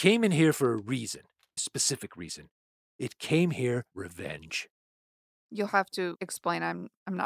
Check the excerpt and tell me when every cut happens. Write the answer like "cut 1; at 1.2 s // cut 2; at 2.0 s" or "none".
cut 1; at 1.6 s // cut 2; at 3.9 s

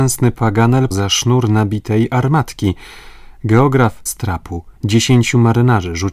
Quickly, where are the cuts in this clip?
cut 1; at 0.9 s // cut 2; at 4.1 s // cut 3; at 4.8 s

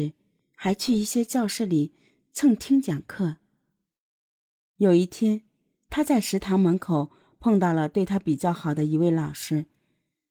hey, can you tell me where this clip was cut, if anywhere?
none

